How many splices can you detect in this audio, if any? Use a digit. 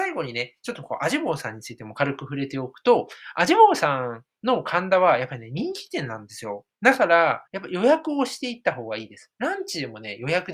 2